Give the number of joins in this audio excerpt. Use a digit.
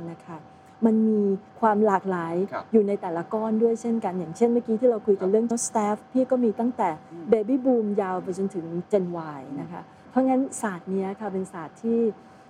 3